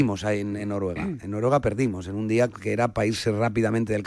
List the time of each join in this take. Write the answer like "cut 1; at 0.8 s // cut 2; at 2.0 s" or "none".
none